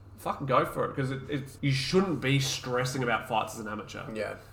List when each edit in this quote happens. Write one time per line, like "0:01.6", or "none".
0:01.6